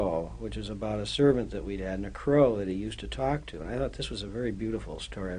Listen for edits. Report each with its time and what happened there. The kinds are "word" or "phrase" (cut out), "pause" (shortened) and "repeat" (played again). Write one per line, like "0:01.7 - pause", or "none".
none